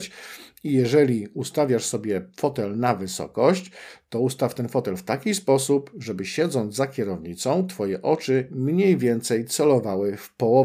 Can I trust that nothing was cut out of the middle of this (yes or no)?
yes